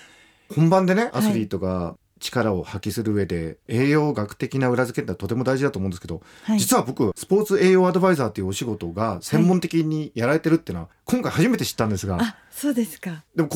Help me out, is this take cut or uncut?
cut